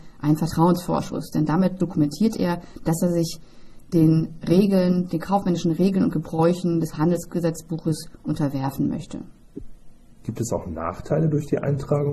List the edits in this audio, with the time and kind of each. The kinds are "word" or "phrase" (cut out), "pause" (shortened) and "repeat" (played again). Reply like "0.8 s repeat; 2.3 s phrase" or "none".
none